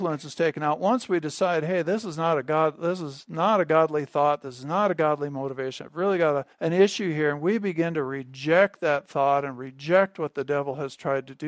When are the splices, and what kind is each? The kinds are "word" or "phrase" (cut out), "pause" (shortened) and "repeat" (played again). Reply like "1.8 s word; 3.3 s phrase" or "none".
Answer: 6.5 s pause

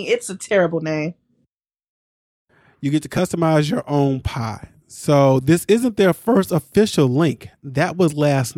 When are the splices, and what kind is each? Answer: none

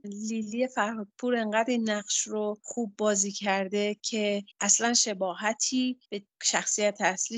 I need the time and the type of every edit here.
4.5 s pause; 6.0 s pause

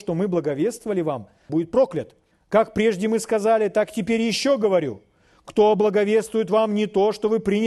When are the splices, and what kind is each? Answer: 1.5 s phrase; 2.3 s pause

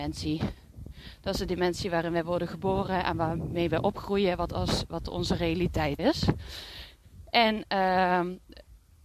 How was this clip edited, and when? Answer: 6.0 s word

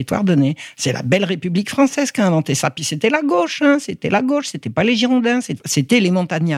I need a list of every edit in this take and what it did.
none

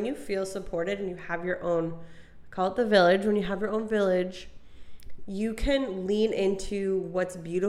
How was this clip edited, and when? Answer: none

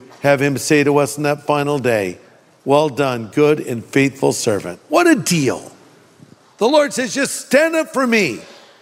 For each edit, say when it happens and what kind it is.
none

